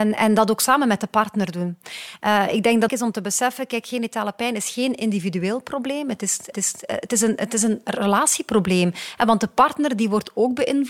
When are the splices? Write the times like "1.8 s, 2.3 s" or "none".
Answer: 2.9 s, 6.5 s